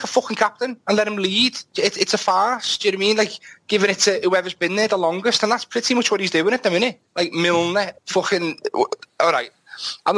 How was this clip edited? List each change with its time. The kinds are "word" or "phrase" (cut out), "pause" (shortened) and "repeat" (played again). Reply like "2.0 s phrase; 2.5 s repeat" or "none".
7.1 s pause; 8.0 s pause

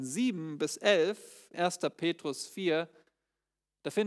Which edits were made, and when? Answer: 1.5 s word

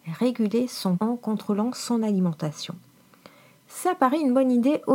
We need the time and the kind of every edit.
1.0 s word

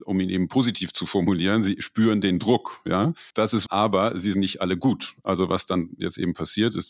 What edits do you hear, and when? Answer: 3.3 s pause; 3.7 s word; 4.3 s phrase

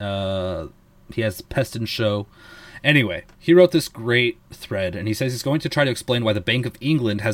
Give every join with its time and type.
3.3 s pause; 4.4 s pause

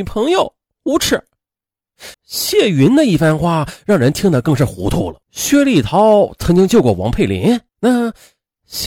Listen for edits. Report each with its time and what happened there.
2.1 s pause; 5.2 s pause; 7.7 s pause

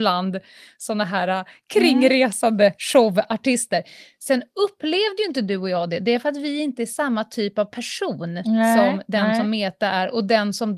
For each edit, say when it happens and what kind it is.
none

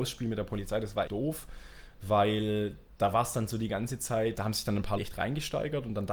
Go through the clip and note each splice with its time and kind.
1.1 s word; 4.4 s word; 5.0 s word

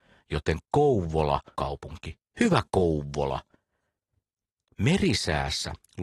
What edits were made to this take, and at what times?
1.5 s phrase

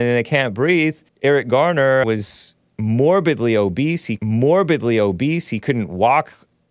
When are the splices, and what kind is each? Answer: 1.1 s pause; 2.0 s word; 4.2 s repeat

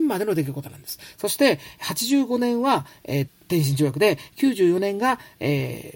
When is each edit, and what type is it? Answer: 3.3 s word

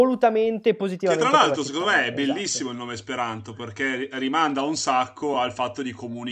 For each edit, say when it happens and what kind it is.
none

